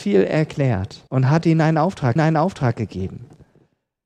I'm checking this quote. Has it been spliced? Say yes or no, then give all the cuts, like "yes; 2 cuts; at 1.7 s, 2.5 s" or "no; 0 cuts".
yes; 2 cuts; at 1.1 s, 2.2 s